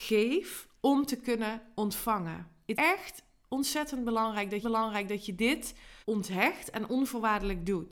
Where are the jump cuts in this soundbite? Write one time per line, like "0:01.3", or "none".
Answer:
0:02.7
0:04.6
0:06.0